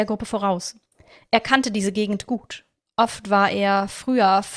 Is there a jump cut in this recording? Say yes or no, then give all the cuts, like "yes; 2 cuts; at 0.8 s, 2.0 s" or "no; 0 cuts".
no; 0 cuts